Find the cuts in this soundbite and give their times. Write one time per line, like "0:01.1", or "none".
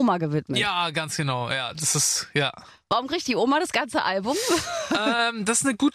none